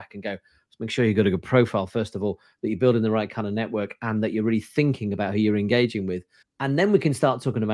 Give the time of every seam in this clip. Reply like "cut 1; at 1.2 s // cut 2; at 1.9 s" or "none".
cut 1; at 6.4 s